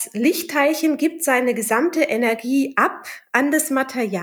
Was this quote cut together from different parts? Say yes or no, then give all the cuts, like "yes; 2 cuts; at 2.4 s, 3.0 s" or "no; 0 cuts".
no; 0 cuts